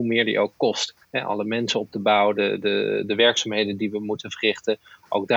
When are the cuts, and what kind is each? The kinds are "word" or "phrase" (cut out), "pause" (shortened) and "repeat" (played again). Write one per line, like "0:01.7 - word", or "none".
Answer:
0:01.0 - pause